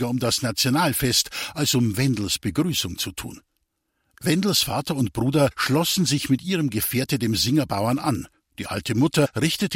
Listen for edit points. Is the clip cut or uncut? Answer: uncut